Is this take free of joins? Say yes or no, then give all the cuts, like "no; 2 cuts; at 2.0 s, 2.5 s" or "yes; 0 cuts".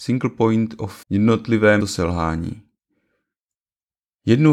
no; 2 cuts; at 1.0 s, 1.8 s